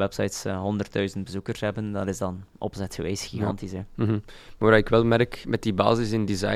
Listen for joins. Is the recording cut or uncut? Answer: uncut